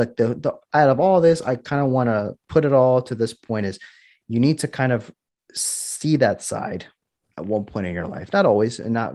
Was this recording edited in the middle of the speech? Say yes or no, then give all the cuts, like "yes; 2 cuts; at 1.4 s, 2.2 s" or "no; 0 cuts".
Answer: no; 0 cuts